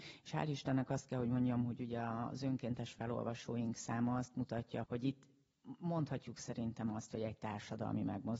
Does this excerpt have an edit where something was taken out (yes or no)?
yes